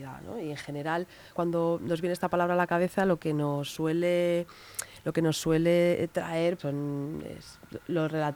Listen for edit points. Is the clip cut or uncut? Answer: cut